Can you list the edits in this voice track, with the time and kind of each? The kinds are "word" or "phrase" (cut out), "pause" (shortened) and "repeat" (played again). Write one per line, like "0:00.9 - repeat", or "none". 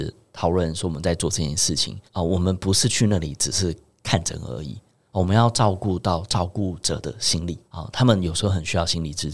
0:02.1 - pause
0:07.6 - pause